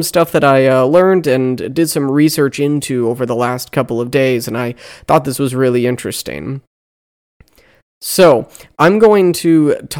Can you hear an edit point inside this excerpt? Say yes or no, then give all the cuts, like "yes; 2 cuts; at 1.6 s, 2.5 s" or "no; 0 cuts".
no; 0 cuts